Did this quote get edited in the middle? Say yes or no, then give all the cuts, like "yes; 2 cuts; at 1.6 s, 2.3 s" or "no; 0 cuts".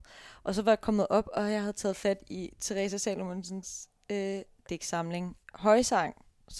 yes; 1 cut; at 5.4 s